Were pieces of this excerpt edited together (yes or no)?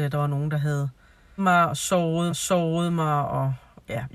yes